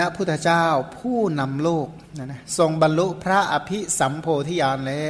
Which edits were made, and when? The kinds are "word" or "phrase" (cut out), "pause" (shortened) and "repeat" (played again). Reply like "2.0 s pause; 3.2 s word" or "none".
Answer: 2.0 s pause